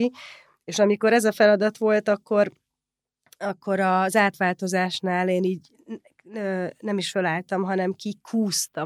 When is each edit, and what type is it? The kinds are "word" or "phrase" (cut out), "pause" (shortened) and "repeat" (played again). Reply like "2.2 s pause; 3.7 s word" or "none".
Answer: none